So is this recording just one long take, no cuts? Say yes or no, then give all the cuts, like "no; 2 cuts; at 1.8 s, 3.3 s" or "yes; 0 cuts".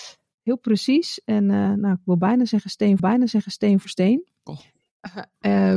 no; 2 cuts; at 3.0 s, 4.4 s